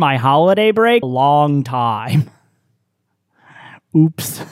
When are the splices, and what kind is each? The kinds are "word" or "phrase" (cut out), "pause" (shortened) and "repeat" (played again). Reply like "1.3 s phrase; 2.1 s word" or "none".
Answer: 1.0 s phrase